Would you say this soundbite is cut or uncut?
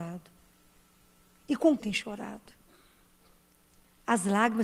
cut